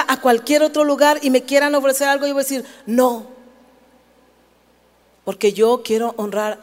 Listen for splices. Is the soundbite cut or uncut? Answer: uncut